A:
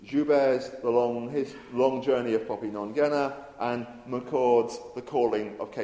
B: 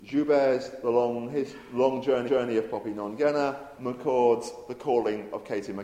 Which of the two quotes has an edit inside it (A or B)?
B